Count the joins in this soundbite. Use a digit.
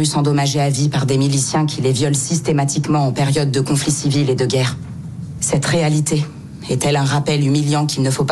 0